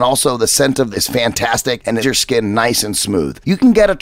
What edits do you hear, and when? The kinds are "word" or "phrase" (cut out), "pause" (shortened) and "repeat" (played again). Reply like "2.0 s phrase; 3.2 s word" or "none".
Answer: 0.9 s phrase; 2.0 s phrase